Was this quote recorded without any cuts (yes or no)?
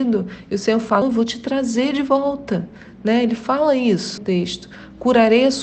no